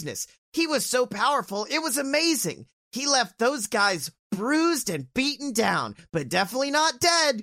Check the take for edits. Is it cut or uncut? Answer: uncut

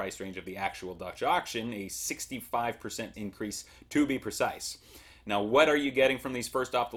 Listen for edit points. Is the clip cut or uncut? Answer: cut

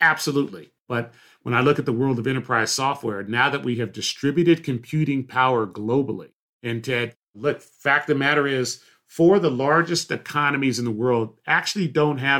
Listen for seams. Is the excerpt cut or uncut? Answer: uncut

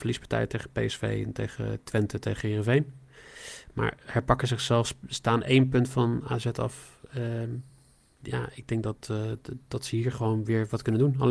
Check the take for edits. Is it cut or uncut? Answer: uncut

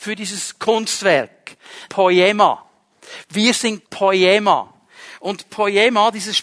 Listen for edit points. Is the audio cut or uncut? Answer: cut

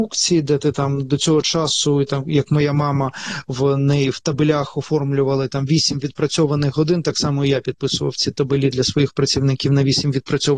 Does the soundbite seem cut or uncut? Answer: uncut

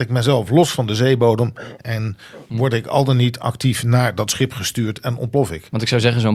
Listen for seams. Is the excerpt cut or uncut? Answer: uncut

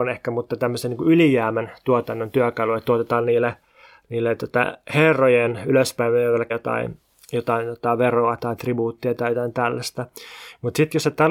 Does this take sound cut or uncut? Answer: cut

